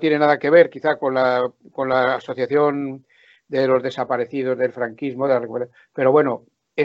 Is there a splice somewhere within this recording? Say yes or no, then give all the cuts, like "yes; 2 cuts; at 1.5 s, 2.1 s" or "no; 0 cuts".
no; 0 cuts